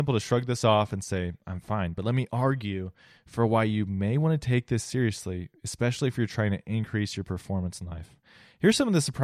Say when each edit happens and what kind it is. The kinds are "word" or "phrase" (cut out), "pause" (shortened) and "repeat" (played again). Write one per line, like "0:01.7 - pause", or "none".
none